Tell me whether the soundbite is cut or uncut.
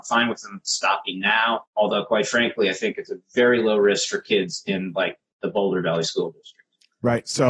cut